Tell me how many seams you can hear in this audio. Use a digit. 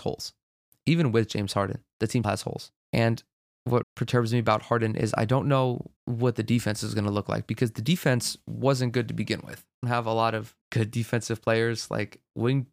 6